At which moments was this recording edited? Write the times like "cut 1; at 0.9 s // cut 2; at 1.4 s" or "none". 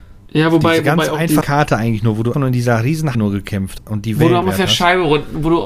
cut 1; at 1.4 s // cut 2; at 2.3 s // cut 3; at 3.1 s // cut 4; at 3.8 s // cut 5; at 4.4 s